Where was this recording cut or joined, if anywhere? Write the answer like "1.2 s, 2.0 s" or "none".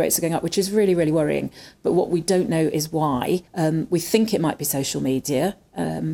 3.5 s